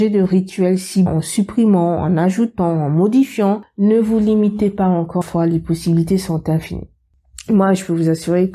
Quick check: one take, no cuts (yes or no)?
no